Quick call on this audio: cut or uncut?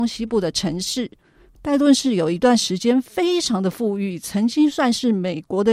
uncut